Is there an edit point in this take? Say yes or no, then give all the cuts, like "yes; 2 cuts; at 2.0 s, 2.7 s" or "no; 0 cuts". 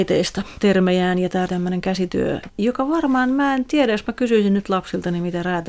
yes; 2 cuts; at 1.5 s, 2.5 s